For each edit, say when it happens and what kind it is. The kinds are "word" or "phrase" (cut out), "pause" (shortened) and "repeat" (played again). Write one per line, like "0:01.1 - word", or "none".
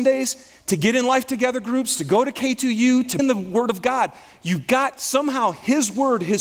0:03.2 - word